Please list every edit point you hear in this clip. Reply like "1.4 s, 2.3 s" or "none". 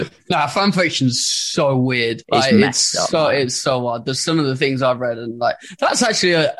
2.2 s